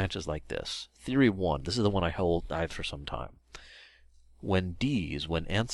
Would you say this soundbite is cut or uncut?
cut